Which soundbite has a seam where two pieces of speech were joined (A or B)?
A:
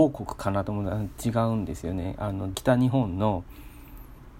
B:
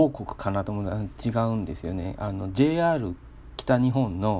A